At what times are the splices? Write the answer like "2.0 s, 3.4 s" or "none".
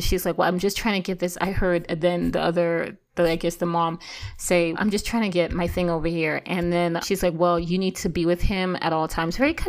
4.7 s, 7.0 s

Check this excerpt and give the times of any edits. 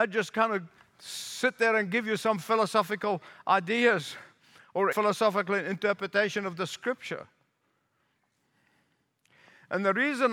4.9 s

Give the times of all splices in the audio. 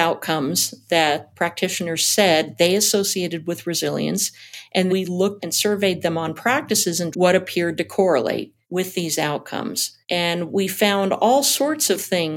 4.9 s, 5.4 s, 7.1 s, 8.6 s, 10.0 s

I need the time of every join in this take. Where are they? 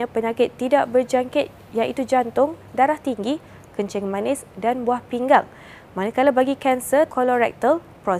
7.1 s

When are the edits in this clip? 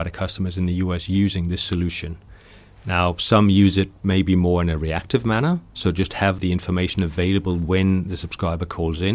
none

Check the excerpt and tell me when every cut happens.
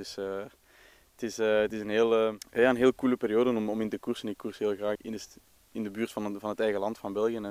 4.9 s

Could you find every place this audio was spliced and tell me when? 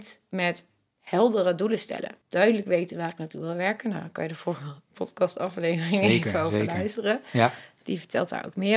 2.2 s

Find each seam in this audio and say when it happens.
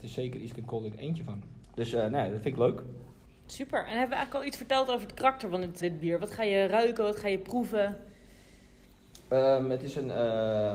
1.6 s, 3.3 s, 5.8 s

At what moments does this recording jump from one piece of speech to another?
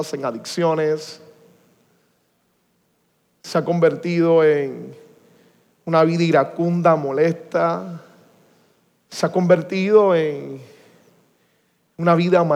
none

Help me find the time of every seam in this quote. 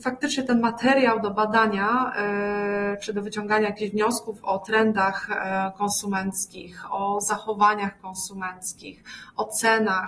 none

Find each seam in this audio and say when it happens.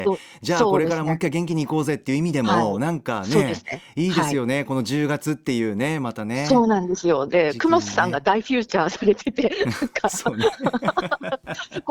none

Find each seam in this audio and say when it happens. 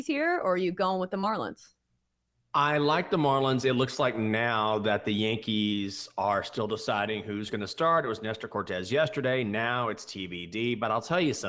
none

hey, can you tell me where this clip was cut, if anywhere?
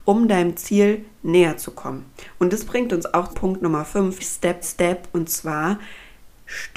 3.3 s, 4.2 s, 4.6 s

